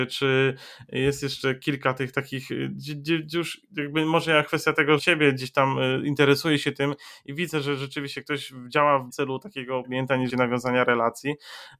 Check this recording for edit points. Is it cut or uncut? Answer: cut